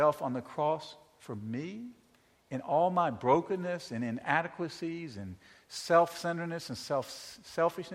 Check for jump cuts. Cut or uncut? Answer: uncut